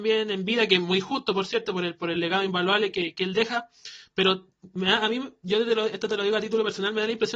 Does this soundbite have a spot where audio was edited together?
no; 0 cuts

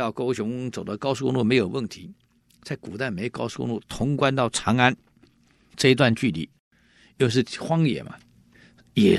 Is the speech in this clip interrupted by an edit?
no; 0 cuts

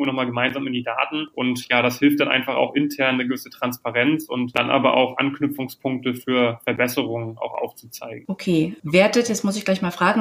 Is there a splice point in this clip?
no; 0 cuts

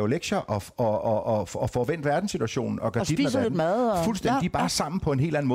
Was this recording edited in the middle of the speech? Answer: no; 0 cuts

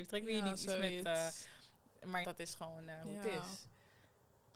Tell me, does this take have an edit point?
yes; 1 cut; at 2.2 s

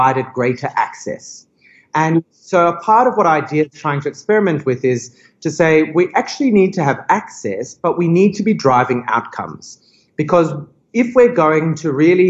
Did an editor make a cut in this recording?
no; 0 cuts

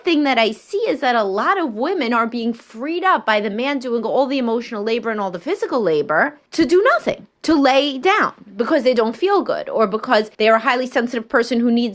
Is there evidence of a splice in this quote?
yes; 3 cuts; at 6.5 s, 7.3 s, 10.3 s

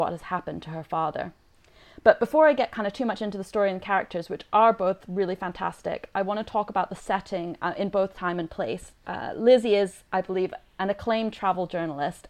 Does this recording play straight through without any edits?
no; 1 cut; at 10.1 s

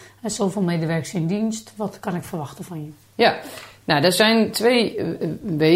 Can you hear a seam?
no; 0 cuts

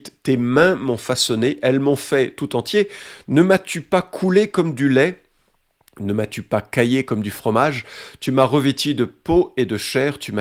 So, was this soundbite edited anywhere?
no; 0 cuts

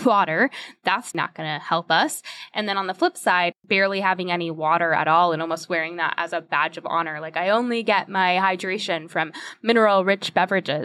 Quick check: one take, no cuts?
no; 2 cuts; at 1.1 s, 3.6 s

